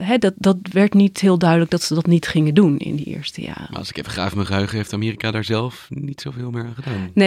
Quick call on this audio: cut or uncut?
uncut